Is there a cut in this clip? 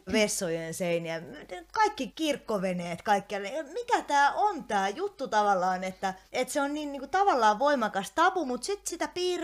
no; 0 cuts

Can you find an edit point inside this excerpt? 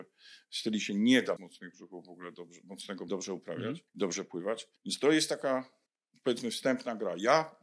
yes; 5 cuts; at 1.4 s, 3.1 s, 3.9 s, 4.8 s, 5.9 s

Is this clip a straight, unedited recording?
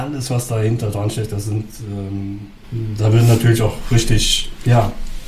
yes; 0 cuts

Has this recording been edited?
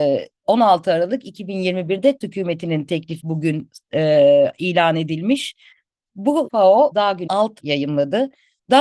yes; 6 cuts; at 2.2 s, 3.2 s, 6.5 s, 6.9 s, 7.3 s, 7.6 s

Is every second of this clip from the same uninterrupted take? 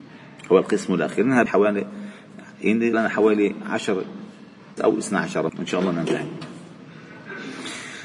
no; 4 cuts; at 1.5 s, 2.9 s, 4.8 s, 5.5 s

